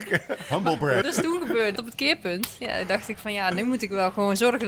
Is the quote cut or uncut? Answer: cut